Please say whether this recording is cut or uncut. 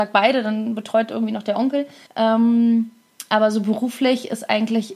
cut